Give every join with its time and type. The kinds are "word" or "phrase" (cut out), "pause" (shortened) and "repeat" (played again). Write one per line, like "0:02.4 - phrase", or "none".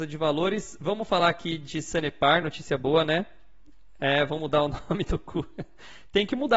none